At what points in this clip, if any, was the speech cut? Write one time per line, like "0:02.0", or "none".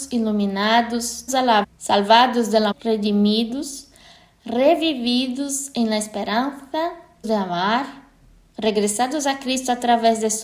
0:01.3
0:01.6
0:02.7
0:07.2